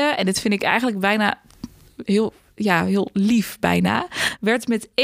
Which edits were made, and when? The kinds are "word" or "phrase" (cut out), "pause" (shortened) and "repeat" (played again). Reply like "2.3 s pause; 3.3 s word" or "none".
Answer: none